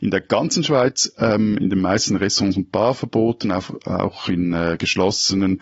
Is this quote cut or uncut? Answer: uncut